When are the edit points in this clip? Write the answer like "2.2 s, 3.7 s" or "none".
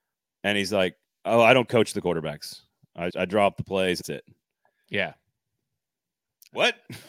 3.1 s, 4.0 s